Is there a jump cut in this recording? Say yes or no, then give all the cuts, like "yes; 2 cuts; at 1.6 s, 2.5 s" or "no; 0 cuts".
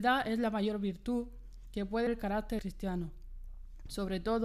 yes; 2 cuts; at 2.1 s, 2.6 s